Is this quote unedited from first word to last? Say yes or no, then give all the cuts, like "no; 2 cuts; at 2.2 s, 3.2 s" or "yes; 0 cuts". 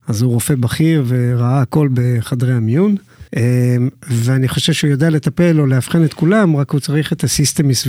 no; 1 cut; at 3.3 s